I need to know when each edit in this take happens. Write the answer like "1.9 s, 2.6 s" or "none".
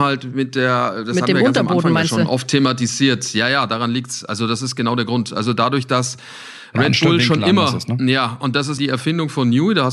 8.8 s